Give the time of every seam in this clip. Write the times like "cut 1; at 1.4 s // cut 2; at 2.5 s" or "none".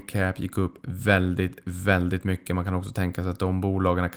none